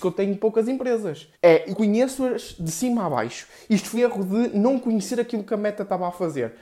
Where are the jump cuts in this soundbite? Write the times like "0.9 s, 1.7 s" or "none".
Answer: 1.3 s, 1.7 s, 4.0 s